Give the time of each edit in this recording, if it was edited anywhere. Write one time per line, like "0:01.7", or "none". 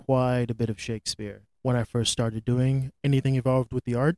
none